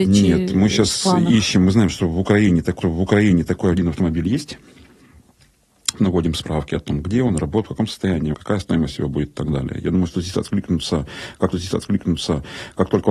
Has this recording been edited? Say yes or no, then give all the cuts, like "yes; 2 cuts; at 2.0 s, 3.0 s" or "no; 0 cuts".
yes; 4 cuts; at 2.8 s, 6.0 s, 8.3 s, 11.5 s